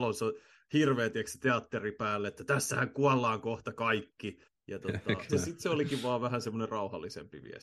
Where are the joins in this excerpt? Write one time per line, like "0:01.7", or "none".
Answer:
0:04.5
0:05.3